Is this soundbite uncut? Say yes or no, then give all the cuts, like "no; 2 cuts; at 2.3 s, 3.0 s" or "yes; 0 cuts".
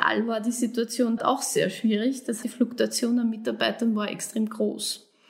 no; 2 cuts; at 1.2 s, 2.4 s